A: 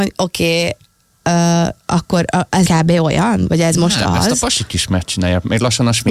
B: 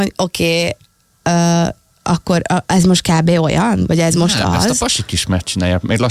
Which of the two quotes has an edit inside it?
A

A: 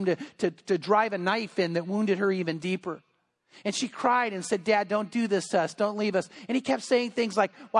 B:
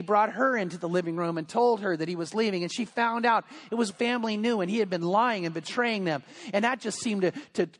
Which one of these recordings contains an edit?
B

